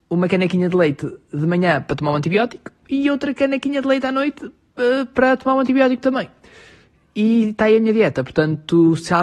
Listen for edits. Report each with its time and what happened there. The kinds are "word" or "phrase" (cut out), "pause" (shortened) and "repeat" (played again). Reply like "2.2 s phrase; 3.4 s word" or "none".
none